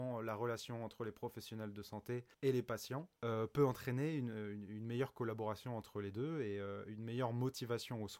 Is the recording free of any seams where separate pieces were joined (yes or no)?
no